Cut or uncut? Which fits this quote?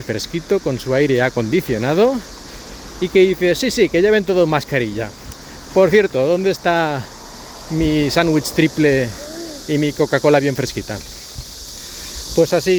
uncut